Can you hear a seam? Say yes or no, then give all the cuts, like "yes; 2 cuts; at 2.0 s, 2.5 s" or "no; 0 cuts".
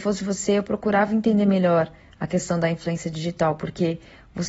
no; 0 cuts